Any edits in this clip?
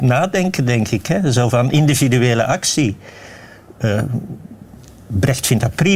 no; 0 cuts

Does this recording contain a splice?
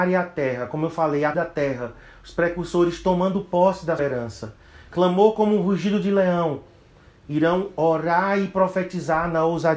yes; 2 cuts; at 1.3 s, 4.0 s

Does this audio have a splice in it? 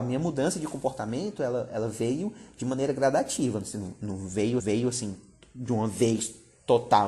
yes; 1 cut; at 4.6 s

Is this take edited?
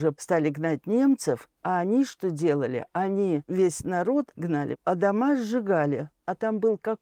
no; 0 cuts

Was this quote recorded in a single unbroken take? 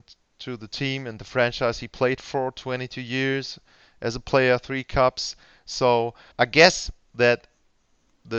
no; 1 cut; at 6.3 s

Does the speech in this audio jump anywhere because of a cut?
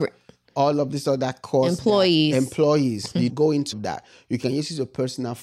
yes; 2 cuts; at 3.3 s, 3.7 s

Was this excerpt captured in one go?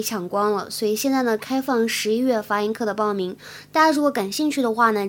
yes; 0 cuts

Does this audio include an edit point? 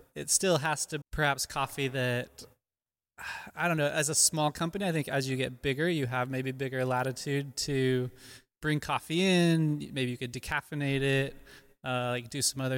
yes; 1 cut; at 1.0 s

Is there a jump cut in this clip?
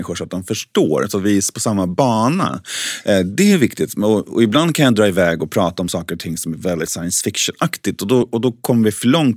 no; 0 cuts

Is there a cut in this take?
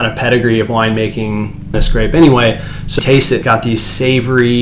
yes; 3 cuts; at 1.7 s, 3.0 s, 3.4 s

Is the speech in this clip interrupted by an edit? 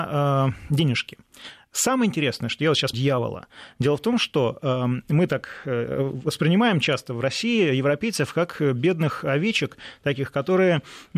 yes; 1 cut; at 2.9 s

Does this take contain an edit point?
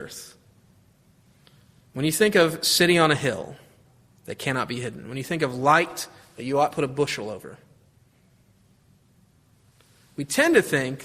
yes; 1 cut; at 6.7 s

